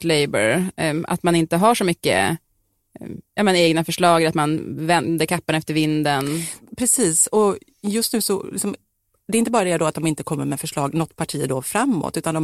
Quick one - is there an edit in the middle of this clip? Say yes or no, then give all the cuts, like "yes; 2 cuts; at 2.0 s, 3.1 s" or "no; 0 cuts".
no; 0 cuts